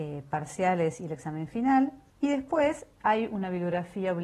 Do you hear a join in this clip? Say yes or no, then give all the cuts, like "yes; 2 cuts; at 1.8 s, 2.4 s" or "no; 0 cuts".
yes; 1 cut; at 2.1 s